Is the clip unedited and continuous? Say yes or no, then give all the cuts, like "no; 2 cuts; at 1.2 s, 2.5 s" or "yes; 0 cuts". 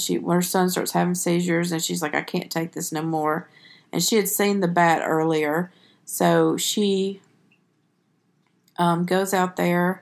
yes; 0 cuts